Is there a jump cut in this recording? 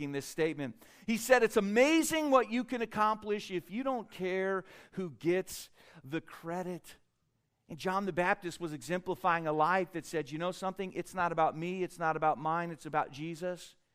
no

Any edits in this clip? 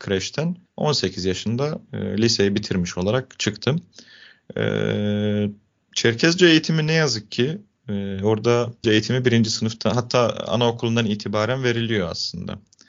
yes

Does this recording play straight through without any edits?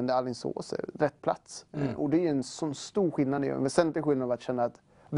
yes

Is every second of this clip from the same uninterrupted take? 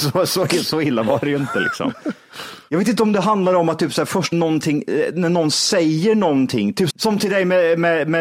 no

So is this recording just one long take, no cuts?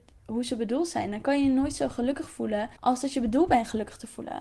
no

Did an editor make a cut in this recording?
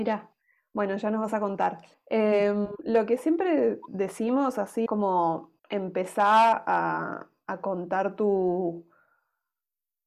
yes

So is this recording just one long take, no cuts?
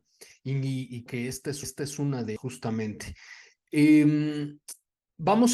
no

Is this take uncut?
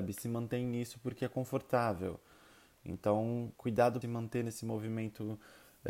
no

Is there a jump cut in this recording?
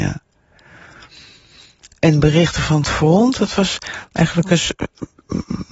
no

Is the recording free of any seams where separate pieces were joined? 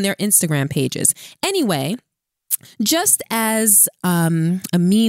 yes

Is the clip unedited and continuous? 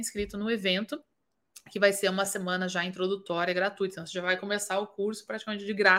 yes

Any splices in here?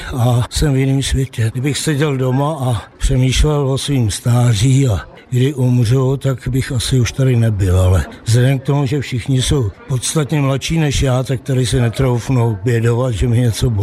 no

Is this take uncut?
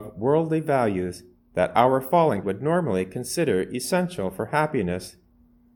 no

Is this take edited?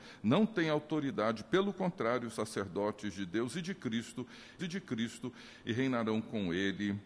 yes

